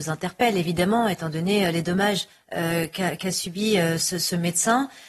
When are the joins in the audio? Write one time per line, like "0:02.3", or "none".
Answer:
0:02.3